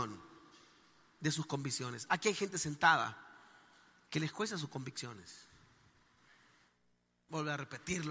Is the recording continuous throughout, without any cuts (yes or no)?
yes